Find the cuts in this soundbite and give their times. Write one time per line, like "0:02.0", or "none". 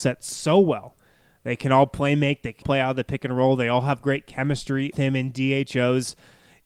0:02.6
0:04.9

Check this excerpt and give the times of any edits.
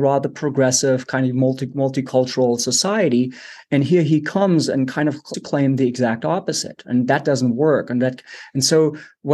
0:05.3

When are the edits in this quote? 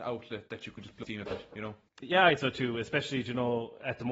0:01.0
0:02.4

